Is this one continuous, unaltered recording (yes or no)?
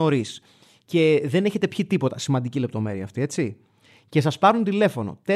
yes